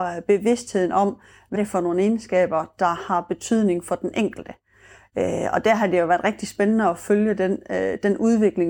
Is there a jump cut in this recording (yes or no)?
yes